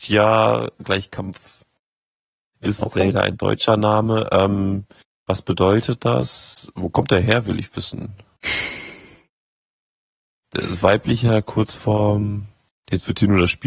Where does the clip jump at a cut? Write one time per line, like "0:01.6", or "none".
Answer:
none